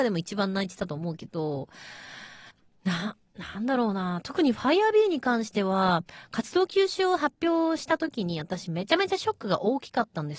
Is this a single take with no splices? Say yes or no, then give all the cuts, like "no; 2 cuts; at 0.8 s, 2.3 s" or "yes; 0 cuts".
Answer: no; 1 cut; at 2.5 s